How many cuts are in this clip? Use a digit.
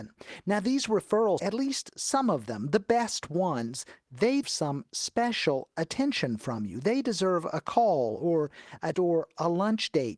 3